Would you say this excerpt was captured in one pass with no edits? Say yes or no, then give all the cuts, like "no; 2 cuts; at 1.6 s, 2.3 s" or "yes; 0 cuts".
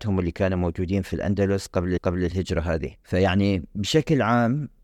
no; 2 cuts; at 2.0 s, 3.0 s